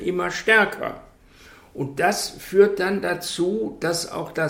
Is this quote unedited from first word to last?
yes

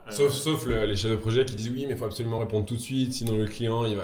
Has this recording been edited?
no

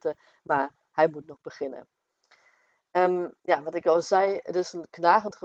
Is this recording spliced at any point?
yes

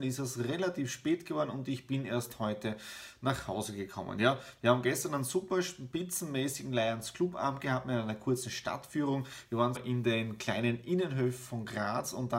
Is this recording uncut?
no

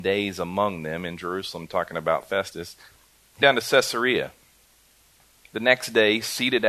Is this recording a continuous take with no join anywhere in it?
no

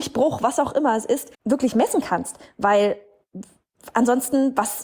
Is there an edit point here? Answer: yes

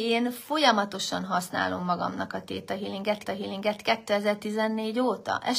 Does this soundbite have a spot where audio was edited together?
yes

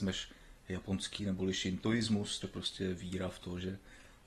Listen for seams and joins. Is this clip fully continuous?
no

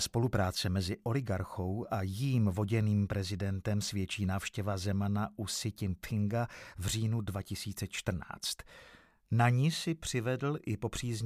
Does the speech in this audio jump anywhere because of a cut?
no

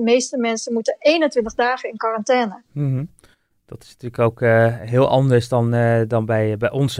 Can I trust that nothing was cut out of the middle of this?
yes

